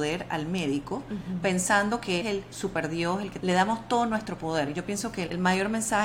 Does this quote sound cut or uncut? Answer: cut